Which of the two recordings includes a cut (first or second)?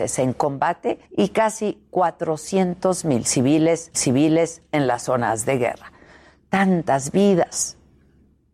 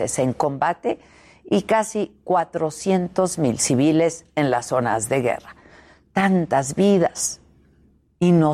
first